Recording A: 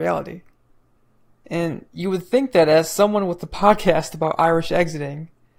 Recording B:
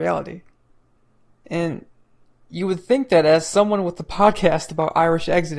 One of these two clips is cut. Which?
A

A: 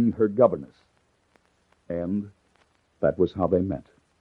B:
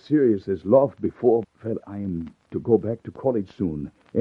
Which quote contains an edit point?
B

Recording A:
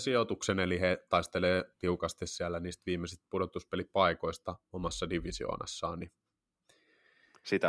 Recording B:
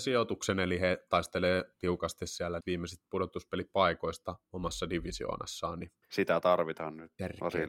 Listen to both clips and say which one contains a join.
B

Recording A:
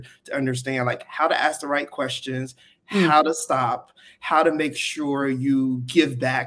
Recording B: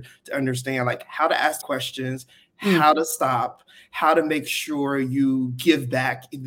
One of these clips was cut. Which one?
B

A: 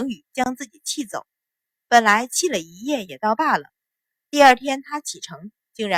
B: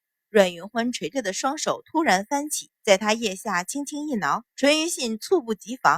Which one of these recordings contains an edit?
B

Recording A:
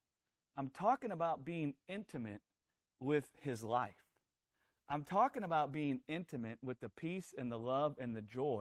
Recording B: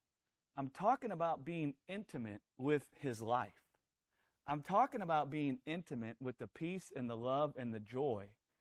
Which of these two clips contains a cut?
B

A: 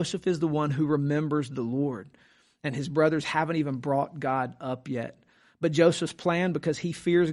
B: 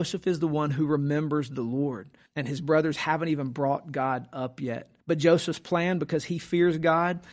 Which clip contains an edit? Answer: B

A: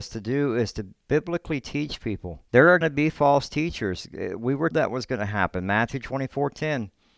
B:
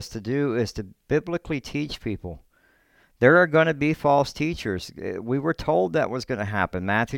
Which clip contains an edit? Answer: A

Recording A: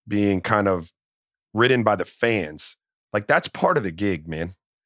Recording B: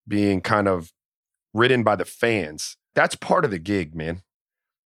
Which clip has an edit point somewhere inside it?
B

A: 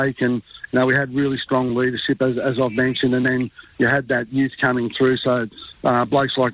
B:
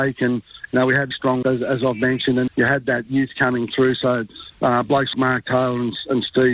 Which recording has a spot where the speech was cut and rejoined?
B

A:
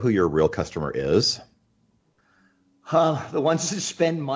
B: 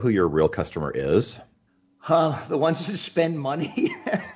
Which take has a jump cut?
B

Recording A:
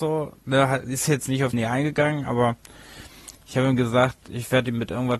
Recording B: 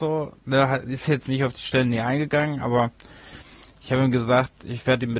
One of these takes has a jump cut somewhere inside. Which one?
A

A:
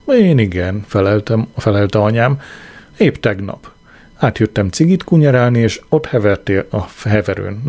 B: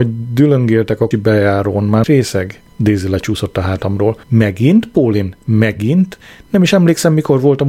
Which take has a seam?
B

